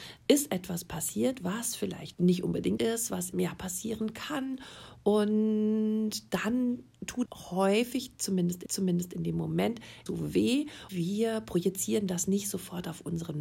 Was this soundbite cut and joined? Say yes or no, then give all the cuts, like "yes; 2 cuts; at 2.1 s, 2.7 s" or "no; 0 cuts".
yes; 7 cuts; at 2.1 s, 2.8 s, 3.3 s, 7.3 s, 8.7 s, 10.1 s, 10.9 s